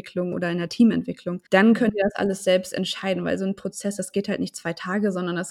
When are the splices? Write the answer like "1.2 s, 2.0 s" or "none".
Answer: 1.5 s